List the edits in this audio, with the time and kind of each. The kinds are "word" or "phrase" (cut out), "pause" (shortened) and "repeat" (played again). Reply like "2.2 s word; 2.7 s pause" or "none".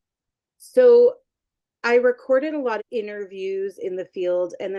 2.8 s word